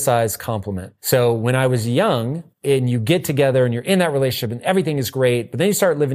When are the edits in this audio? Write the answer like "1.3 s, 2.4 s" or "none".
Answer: 1.0 s, 2.5 s